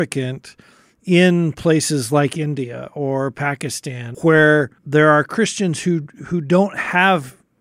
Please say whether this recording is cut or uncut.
cut